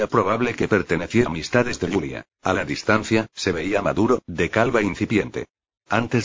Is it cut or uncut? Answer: cut